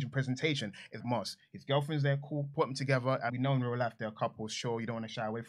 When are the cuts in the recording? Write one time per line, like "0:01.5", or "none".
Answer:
0:01.0
0:03.3